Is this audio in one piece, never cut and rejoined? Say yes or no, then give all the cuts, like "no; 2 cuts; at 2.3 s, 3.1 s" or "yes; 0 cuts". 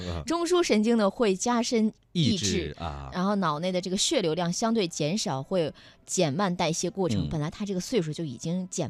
no; 1 cut; at 2.0 s